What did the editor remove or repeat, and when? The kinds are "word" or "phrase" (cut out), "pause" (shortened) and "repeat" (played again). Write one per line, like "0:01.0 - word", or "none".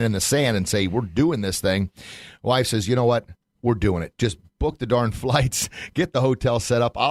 none